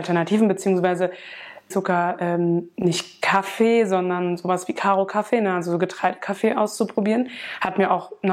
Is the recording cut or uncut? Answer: cut